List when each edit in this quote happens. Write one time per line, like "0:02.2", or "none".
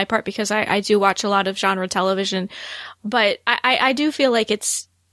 none